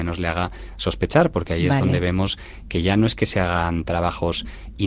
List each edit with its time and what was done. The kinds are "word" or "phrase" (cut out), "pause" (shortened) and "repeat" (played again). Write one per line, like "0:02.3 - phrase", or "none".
none